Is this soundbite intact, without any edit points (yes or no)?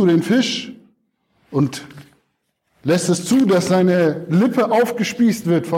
yes